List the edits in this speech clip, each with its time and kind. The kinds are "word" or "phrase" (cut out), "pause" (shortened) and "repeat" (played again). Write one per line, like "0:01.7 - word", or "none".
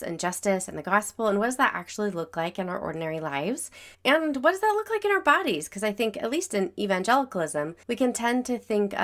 0:03.9 - pause
0:07.8 - pause